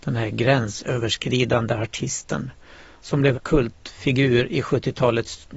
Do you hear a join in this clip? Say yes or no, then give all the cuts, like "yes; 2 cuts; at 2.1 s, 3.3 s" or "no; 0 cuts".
yes; 1 cut; at 3.3 s